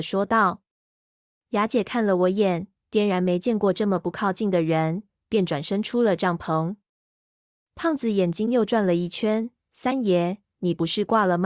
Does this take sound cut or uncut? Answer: uncut